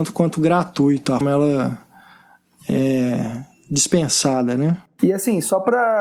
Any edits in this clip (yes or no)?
yes